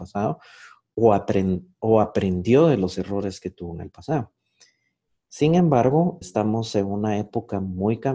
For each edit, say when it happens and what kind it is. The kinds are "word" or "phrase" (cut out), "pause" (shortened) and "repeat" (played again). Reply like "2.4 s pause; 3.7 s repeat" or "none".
6.2 s word